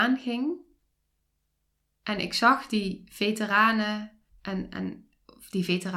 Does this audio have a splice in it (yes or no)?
yes